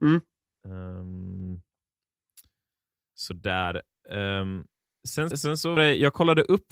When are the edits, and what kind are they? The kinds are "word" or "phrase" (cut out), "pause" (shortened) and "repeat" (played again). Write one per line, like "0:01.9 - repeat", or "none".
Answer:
0:05.3 - word
0:05.8 - word